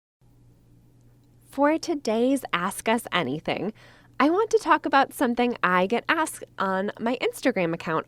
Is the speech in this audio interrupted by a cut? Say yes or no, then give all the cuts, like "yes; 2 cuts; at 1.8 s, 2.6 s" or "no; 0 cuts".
no; 0 cuts